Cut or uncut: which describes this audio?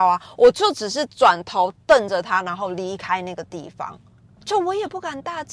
uncut